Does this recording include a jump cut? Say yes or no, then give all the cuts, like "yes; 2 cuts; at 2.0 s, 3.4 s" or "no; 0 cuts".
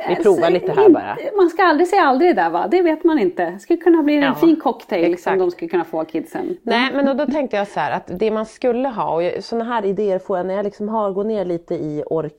no; 0 cuts